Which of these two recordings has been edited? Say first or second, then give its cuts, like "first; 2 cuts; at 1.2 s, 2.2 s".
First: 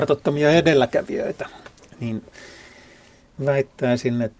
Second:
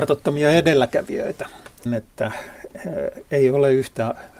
second; 1 cut; at 1.9 s